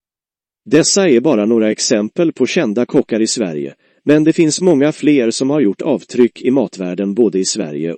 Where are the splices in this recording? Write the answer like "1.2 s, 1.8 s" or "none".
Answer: none